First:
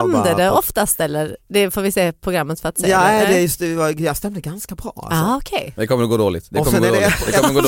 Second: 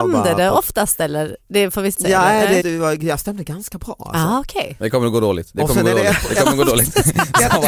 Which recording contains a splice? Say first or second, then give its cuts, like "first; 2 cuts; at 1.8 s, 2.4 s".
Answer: second; 2 cuts; at 1.9 s, 2.6 s